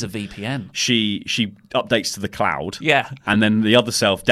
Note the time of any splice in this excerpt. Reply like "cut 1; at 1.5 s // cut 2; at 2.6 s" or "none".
none

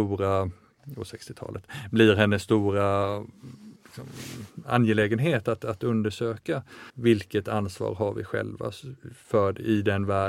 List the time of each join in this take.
cut 1; at 3.8 s // cut 2; at 6.9 s

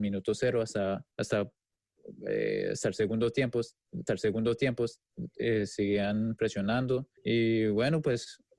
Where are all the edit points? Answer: cut 1; at 1.1 s // cut 2; at 4.1 s // cut 3; at 7.2 s

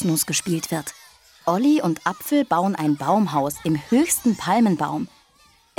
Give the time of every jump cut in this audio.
none

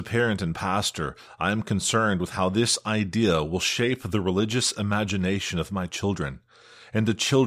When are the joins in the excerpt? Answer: none

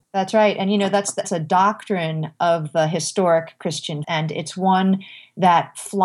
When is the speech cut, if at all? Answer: cut 1; at 1.2 s // cut 2; at 4.0 s

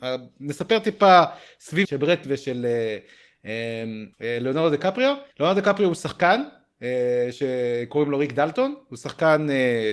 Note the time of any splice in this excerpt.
cut 1; at 1.8 s // cut 2; at 2.2 s // cut 3; at 4.1 s // cut 4; at 5.3 s

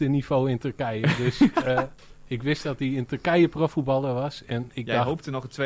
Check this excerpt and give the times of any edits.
cut 1; at 2.0 s

